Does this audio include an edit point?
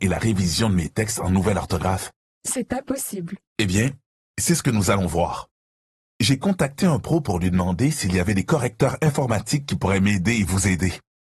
no; 0 cuts

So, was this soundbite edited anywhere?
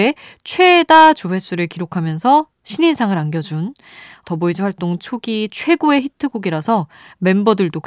no; 0 cuts

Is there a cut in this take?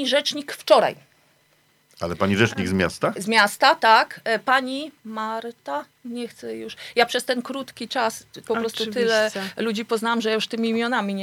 no; 0 cuts

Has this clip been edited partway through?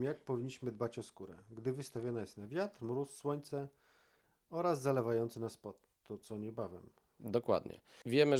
no; 0 cuts

